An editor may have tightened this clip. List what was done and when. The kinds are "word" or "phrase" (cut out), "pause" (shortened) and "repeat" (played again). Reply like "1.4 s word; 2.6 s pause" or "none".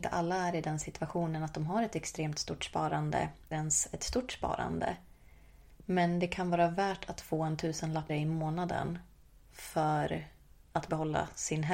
3.5 s word; 8.1 s word